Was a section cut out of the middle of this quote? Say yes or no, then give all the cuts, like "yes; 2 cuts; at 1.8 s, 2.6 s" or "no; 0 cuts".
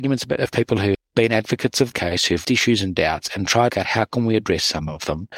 yes; 4 cuts; at 0.9 s, 1.9 s, 2.4 s, 3.7 s